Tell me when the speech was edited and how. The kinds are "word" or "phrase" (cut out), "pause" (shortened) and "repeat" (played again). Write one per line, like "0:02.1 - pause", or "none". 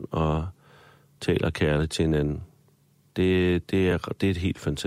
none

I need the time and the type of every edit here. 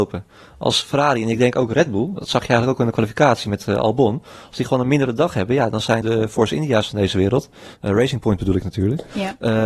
0:06.0 - word

